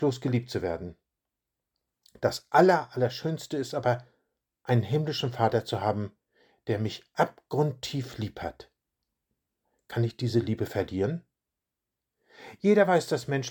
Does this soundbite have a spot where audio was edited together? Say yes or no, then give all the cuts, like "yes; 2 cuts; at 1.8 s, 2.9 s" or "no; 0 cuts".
no; 0 cuts